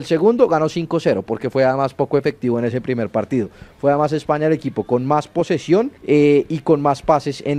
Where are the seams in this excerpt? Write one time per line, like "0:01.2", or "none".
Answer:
0:06.0